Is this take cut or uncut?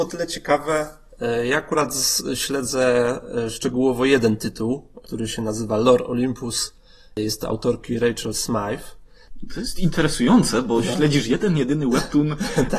uncut